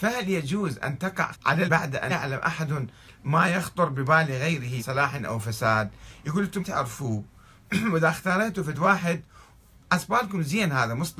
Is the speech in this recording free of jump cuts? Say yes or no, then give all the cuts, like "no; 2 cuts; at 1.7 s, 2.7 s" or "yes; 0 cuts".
no; 5 cuts; at 1.3 s, 1.7 s, 2.1 s, 4.8 s, 6.6 s